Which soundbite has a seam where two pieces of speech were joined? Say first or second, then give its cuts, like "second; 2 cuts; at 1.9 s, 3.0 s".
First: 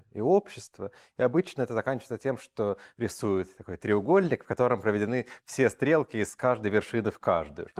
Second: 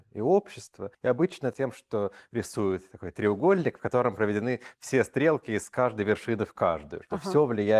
second; 2 cuts; at 0.9 s, 1.5 s